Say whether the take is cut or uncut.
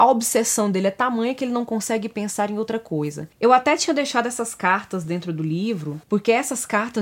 uncut